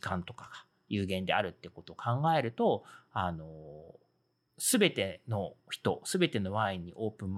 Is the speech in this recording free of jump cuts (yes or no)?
no